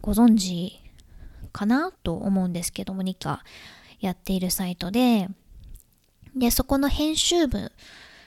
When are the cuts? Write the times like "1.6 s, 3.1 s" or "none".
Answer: 1.9 s, 3.2 s